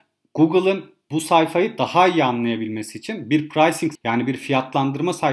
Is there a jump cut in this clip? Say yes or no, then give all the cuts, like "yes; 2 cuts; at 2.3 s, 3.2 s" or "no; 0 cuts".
yes; 1 cut; at 3.9 s